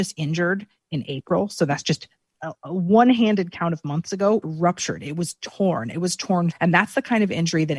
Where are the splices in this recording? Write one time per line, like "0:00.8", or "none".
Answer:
0:02.3
0:04.4
0:06.5